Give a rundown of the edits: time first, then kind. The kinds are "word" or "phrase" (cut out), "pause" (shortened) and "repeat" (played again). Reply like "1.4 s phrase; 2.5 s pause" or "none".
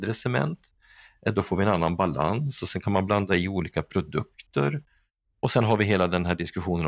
none